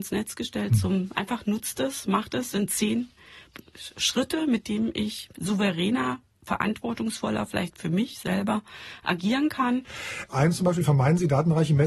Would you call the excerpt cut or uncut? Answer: uncut